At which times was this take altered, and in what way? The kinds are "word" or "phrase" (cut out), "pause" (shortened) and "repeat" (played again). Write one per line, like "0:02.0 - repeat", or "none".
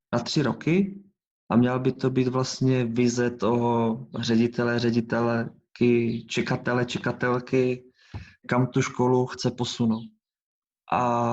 none